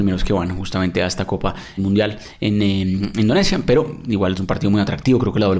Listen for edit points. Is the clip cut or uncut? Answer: cut